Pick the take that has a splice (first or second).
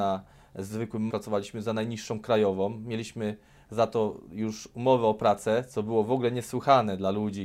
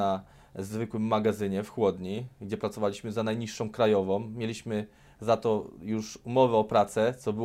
first